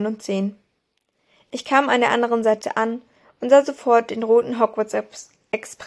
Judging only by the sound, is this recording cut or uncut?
uncut